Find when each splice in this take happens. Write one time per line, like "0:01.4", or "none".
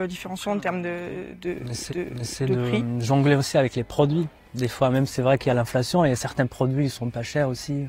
0:01.9